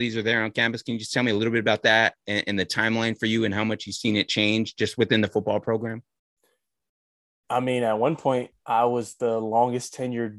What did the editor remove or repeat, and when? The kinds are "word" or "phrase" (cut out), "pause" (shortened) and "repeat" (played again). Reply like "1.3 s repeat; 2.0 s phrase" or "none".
none